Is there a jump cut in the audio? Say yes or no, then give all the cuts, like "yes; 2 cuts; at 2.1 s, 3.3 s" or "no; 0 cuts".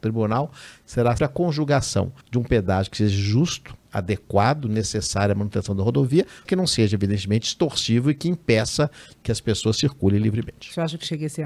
yes; 3 cuts; at 1.2 s, 2.2 s, 6.5 s